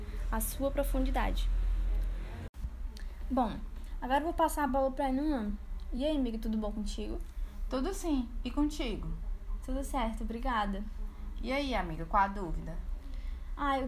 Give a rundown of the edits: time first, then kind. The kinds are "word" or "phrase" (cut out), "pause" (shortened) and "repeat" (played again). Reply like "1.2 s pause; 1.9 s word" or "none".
none